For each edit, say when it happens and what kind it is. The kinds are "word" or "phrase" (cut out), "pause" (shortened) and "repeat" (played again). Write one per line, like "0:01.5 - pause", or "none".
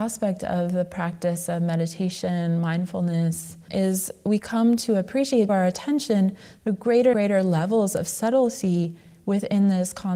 0:03.7 - word
0:04.4 - word
0:05.5 - word
0:07.1 - word

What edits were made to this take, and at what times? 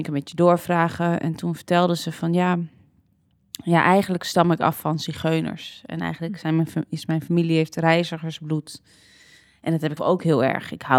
0:10.0 - word

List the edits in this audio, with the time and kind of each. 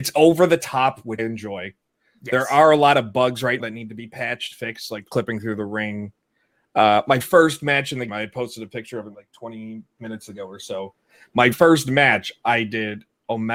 0:01.2 - word
0:03.6 - word
0:04.5 - word
0:05.1 - word
0:07.2 - word
0:08.1 - word
0:09.1 - word
0:11.5 - word

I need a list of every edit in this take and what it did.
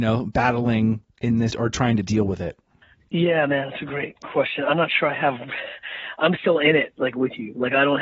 0:01.5 - phrase

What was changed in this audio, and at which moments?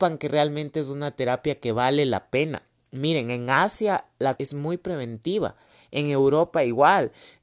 0:04.4 - word

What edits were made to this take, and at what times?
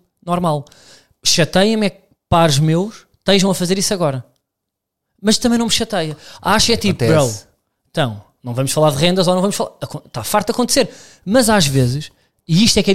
none

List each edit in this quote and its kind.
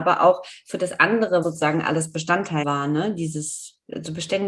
0:01.4 - word
0:02.6 - phrase

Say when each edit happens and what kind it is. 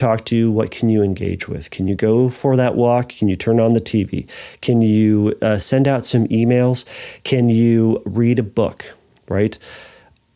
none

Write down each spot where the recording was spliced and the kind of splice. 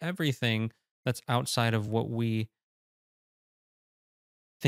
none

